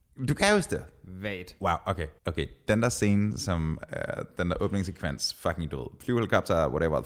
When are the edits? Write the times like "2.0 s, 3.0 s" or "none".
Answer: 2.2 s